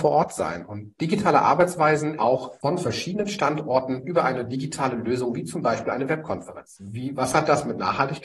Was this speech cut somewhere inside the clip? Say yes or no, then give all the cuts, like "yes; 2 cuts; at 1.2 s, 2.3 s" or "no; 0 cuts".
yes; 2 cuts; at 2.2 s, 4.0 s